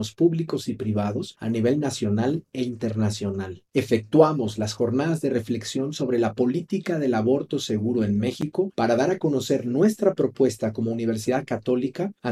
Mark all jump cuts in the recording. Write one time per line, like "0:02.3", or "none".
0:03.7